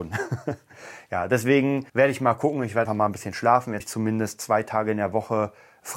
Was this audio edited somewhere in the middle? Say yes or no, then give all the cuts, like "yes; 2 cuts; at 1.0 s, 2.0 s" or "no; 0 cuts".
yes; 3 cuts; at 1.9 s, 2.9 s, 3.8 s